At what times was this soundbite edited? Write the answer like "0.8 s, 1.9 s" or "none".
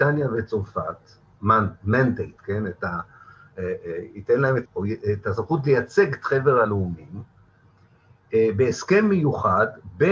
2.4 s, 4.7 s

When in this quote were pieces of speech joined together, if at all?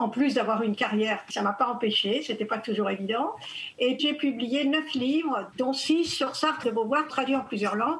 1.3 s, 4.0 s, 5.5 s, 6.6 s, 7.1 s

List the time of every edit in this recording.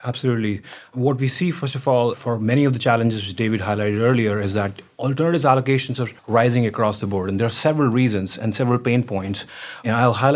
6.2 s

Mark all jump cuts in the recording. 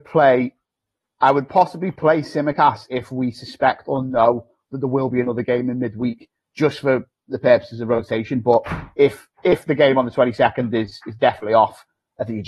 none

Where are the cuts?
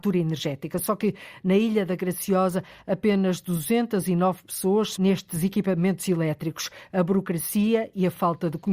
4.9 s

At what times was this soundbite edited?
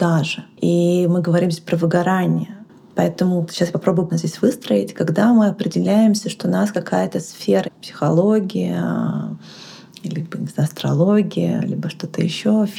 3.5 s, 4.1 s, 7.6 s

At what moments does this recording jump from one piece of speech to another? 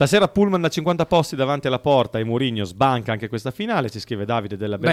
none

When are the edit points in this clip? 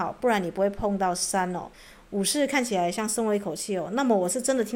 1.7 s

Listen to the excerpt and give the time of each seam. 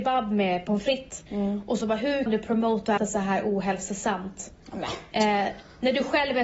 1.3 s, 1.8 s, 2.3 s, 3.0 s

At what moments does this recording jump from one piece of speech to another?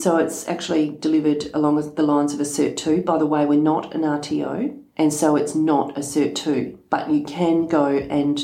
4.9 s

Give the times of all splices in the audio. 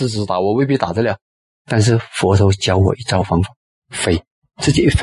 1.3 s

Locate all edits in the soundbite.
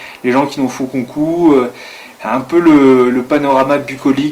none

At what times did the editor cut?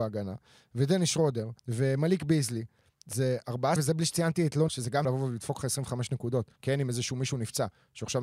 1.6 s, 3.8 s, 4.7 s, 5.0 s, 6.6 s

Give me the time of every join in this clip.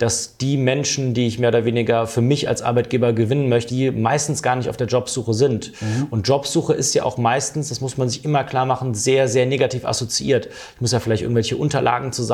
3.7 s

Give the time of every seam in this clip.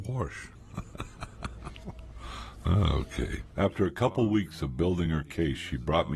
none

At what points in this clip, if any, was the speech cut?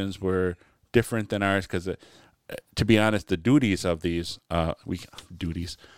none

